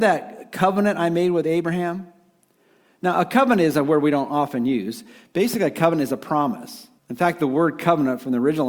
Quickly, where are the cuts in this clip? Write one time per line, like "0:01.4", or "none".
0:07.0